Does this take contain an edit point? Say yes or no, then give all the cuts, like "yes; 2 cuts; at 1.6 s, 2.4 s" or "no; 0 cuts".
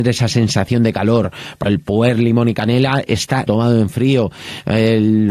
yes; 2 cuts; at 1.7 s, 3.5 s